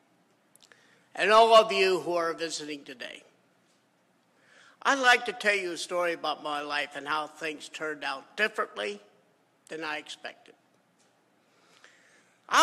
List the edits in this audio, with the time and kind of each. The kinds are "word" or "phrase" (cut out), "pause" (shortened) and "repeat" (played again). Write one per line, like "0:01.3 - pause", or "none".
none